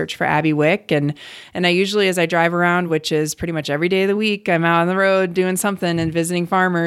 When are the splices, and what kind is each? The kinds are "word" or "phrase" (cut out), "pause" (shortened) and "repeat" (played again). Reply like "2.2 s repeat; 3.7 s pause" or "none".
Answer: none